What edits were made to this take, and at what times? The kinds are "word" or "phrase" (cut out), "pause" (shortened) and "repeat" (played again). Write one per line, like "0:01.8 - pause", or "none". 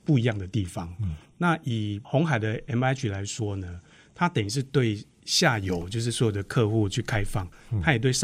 none